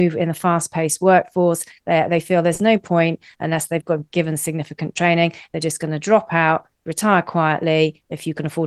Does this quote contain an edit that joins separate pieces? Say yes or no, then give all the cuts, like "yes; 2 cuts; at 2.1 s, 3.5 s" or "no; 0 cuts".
no; 0 cuts